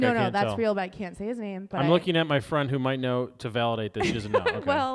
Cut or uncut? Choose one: uncut